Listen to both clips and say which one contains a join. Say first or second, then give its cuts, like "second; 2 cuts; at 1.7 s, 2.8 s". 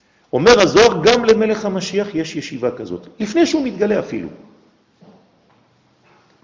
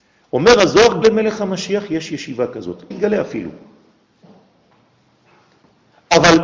second; 2 cuts; at 1.0 s, 2.9 s